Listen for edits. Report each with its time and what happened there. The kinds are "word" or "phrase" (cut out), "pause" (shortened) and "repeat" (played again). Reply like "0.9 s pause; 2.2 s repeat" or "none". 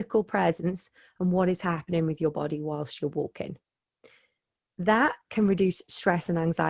none